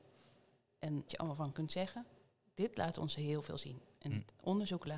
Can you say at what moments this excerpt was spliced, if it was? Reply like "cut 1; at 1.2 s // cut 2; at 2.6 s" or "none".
cut 1; at 1.1 s // cut 2; at 1.5 s